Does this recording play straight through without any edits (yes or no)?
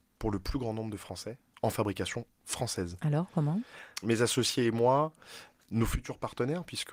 yes